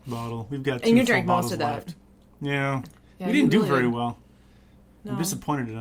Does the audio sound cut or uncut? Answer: uncut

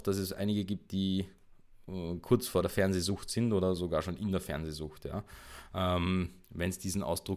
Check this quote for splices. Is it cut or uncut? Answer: uncut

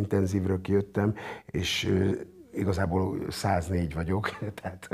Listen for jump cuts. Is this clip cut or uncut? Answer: uncut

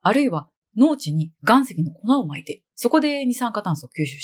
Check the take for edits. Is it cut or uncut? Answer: cut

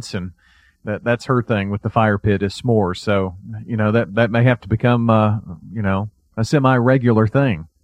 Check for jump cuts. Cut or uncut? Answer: uncut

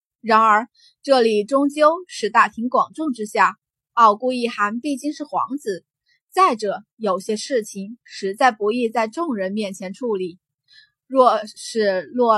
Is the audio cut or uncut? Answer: uncut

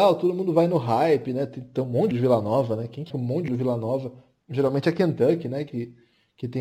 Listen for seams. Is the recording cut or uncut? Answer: cut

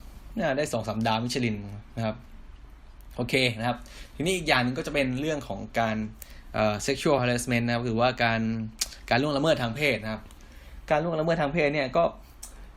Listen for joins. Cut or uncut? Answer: uncut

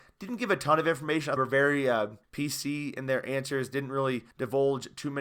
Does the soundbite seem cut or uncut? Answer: cut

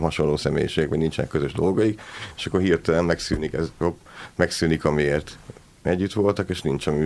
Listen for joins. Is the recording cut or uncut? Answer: uncut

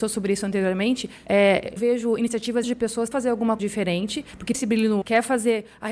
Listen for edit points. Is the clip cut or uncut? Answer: cut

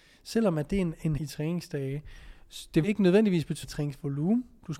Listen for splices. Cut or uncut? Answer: cut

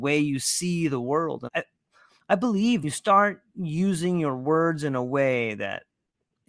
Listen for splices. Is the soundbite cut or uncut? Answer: cut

